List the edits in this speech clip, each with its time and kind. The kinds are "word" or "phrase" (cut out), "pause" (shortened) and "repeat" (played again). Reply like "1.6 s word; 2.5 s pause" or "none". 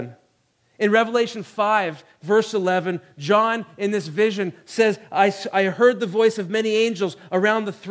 none